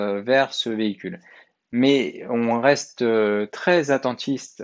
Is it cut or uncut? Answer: uncut